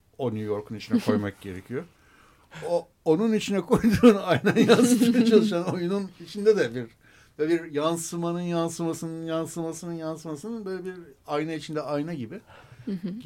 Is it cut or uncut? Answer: uncut